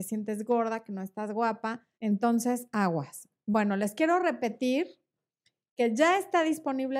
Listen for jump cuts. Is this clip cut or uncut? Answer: cut